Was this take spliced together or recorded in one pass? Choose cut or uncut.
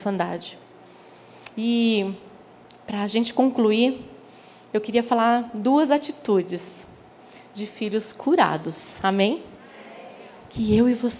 uncut